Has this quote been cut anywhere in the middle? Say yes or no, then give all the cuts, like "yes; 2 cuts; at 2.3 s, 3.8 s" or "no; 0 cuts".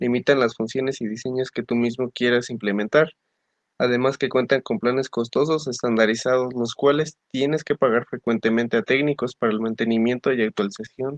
no; 0 cuts